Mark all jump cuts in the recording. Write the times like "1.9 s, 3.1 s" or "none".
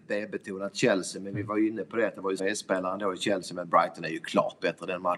2.4 s